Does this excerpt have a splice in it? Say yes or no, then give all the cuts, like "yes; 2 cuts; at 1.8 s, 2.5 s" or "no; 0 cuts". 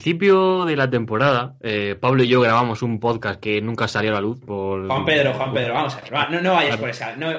no; 0 cuts